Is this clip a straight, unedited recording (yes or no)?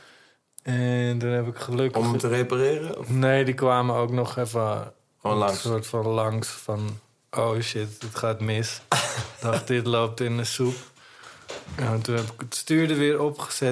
yes